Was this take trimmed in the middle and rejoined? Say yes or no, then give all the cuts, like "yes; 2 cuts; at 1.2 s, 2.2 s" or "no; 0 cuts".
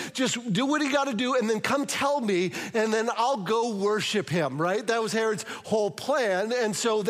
no; 0 cuts